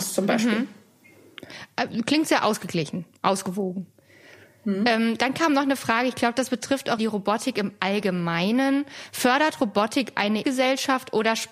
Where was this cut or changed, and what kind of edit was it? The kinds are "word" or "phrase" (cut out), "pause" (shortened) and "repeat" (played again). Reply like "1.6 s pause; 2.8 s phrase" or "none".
7.0 s word; 10.4 s word